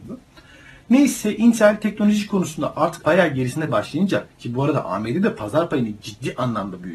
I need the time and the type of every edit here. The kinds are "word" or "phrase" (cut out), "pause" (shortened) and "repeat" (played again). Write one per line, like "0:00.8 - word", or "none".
0:03.0 - word
0:03.7 - word